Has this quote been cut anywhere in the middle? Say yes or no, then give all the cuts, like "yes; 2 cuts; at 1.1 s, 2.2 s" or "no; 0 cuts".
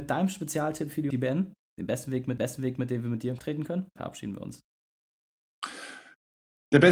yes; 4 cuts; at 1.1 s, 2.4 s, 3.4 s, 4.0 s